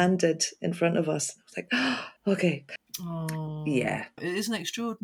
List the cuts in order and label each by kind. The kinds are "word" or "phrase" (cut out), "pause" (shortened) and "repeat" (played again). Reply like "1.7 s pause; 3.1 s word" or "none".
2.2 s pause